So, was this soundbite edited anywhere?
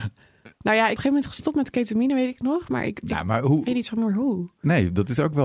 yes; 1 cut; at 1.0 s

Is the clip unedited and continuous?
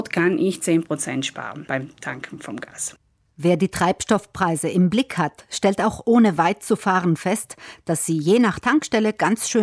yes; 0 cuts

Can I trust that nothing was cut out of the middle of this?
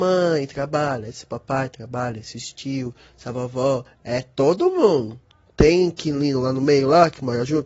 yes; 0 cuts

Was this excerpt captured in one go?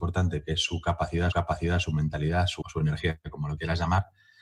no; 2 cuts; at 1.3 s, 2.6 s

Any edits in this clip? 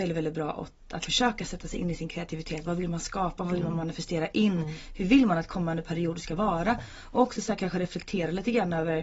yes; 1 cut; at 1.0 s

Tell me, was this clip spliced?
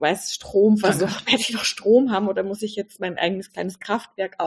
no; 0 cuts

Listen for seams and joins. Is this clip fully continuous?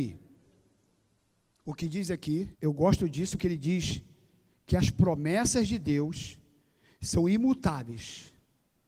no; 2 cuts; at 2.5 s, 3.4 s

